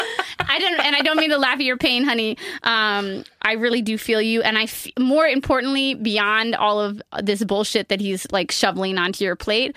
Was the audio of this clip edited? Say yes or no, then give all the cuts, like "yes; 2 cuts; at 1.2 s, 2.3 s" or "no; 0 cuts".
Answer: no; 0 cuts